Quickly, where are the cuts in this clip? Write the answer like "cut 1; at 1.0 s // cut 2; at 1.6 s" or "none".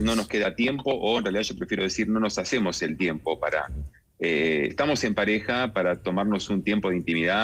cut 1; at 4.7 s